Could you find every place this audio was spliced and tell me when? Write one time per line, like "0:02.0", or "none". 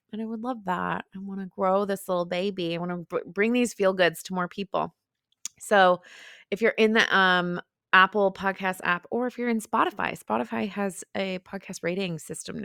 none